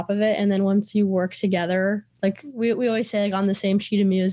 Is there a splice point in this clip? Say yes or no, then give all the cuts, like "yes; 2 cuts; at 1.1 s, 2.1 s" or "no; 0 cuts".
no; 0 cuts